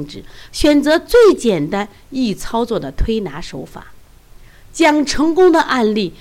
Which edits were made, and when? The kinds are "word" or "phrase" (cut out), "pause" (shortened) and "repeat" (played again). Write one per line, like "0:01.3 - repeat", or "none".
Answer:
none